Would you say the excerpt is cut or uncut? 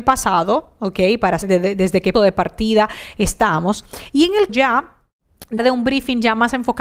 cut